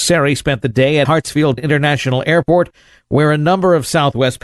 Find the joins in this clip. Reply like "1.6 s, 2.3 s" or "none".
1.0 s, 1.6 s